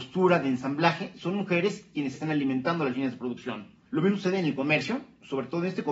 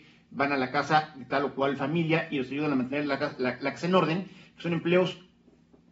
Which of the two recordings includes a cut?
first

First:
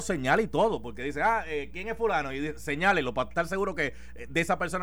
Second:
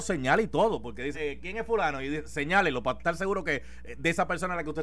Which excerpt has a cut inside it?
second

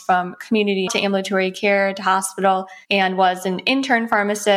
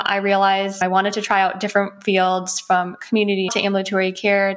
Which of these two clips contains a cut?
first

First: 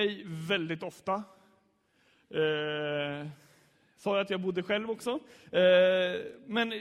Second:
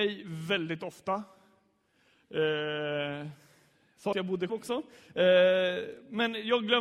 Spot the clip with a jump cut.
second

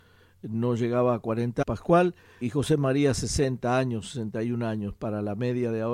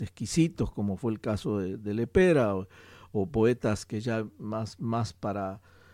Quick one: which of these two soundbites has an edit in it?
first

